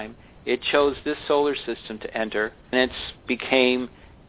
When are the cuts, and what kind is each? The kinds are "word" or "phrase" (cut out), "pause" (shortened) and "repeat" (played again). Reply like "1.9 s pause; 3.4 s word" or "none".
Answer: 2.7 s word